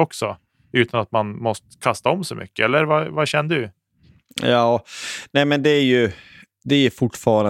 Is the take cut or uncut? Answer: uncut